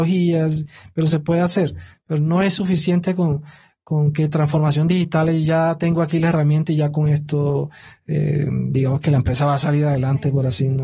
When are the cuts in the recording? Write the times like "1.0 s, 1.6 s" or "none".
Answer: none